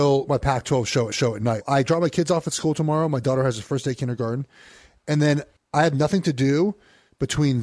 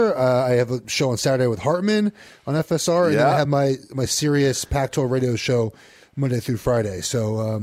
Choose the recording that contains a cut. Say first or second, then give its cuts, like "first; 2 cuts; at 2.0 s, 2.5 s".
first; 3 cuts; at 1.1 s, 1.6 s, 5.6 s